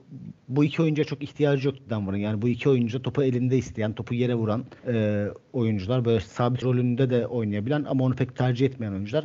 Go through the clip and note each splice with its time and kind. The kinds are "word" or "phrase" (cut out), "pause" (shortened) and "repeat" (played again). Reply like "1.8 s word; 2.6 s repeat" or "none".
4.8 s pause; 6.6 s word